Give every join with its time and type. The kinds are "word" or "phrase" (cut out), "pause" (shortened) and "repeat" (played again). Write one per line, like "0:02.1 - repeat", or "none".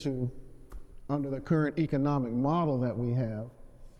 none